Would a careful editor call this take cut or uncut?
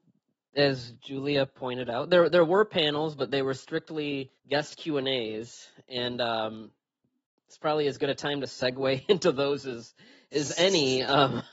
cut